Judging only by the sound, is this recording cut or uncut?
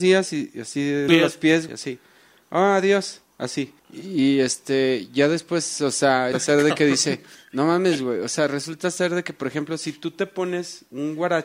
cut